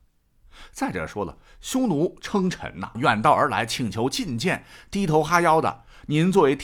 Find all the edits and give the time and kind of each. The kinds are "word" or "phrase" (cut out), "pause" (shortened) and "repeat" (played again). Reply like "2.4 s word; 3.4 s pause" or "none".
3.0 s phrase